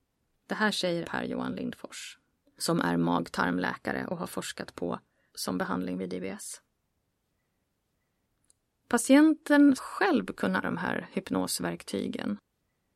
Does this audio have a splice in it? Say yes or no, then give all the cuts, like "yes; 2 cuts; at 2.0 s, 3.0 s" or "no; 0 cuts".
yes; 4 cuts; at 1.0 s, 5.3 s, 9.8 s, 10.6 s